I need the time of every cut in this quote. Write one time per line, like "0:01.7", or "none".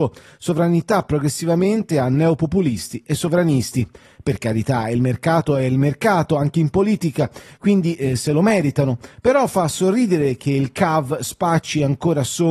none